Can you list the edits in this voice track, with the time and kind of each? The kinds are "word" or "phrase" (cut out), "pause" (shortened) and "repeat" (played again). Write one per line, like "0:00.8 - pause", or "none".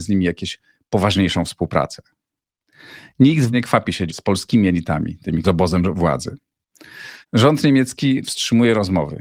0:03.5 - word
0:04.1 - phrase
0:05.4 - phrase
0:07.2 - pause